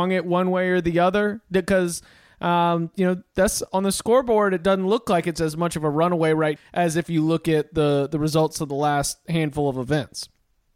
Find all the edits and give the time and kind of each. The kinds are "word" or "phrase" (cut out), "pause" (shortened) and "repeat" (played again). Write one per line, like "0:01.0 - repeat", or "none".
0:06.6 - word